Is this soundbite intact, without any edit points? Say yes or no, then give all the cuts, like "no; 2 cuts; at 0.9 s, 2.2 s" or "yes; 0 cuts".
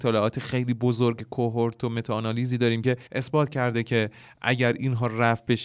no; 1 cut; at 3.1 s